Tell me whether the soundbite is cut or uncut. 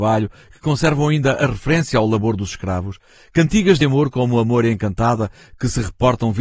uncut